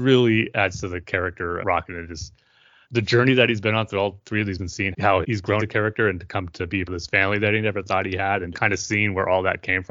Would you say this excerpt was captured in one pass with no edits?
no; 8 cuts; at 1.6 s, 2.8 s, 4.6 s, 4.9 s, 5.2 s, 5.6 s, 6.9 s, 8.5 s

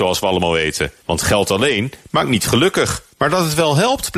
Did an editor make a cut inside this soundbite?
yes; 2 cuts; at 1.0 s, 3.1 s

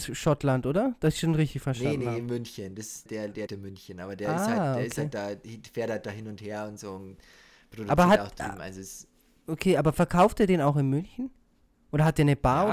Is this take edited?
yes; 2 cuts; at 3.1 s, 3.5 s

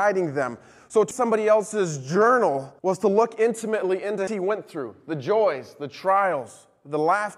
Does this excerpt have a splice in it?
yes; 3 cuts; at 1.1 s, 2.8 s, 4.3 s

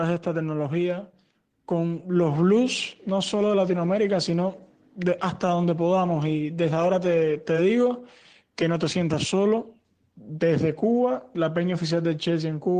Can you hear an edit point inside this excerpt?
no; 0 cuts

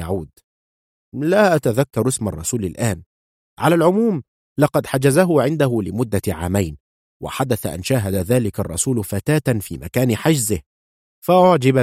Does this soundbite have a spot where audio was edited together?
no; 0 cuts

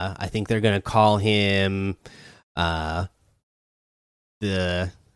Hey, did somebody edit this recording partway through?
no; 0 cuts

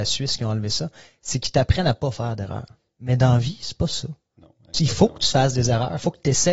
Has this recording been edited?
no; 0 cuts

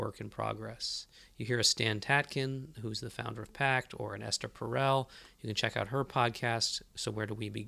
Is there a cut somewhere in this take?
no; 0 cuts

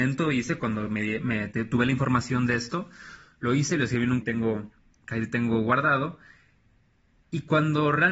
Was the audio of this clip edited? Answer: yes; 2 cuts; at 4.2 s, 5.0 s

